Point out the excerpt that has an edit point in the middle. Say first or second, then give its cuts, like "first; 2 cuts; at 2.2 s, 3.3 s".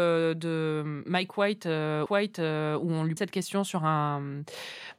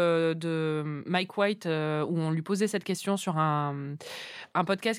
first; 2 cuts; at 2.1 s, 3.2 s